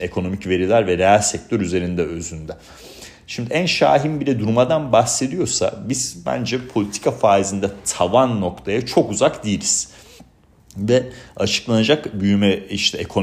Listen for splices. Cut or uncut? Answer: uncut